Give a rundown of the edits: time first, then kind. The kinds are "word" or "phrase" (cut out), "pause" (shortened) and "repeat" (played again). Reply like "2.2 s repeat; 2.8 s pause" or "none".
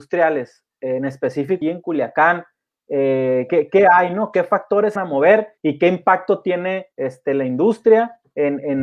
1.6 s word; 3.5 s word; 5.0 s phrase; 5.6 s pause; 6.9 s pause